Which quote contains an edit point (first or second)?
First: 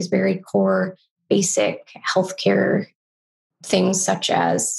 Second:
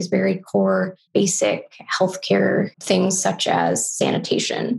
second